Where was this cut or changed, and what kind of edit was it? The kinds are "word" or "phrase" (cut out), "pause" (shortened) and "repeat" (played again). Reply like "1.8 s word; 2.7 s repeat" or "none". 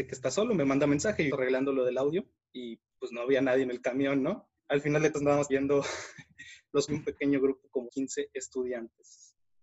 1.3 s phrase; 2.4 s pause; 4.6 s pause; 5.1 s word; 5.5 s word; 6.9 s word; 7.9 s word